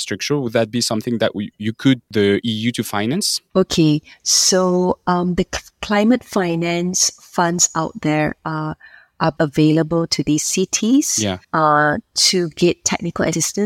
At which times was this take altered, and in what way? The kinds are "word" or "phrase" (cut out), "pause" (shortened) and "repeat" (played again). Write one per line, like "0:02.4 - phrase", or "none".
0:02.1 - word
0:05.7 - pause
0:09.4 - word
0:11.4 - pause